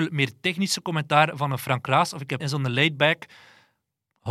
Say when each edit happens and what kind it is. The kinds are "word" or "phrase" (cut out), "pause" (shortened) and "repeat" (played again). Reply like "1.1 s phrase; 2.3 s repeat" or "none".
2.4 s word